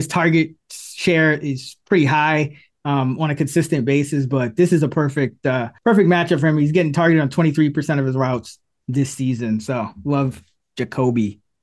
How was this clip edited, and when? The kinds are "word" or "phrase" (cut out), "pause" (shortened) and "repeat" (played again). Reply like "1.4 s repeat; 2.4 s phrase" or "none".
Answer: 5.8 s pause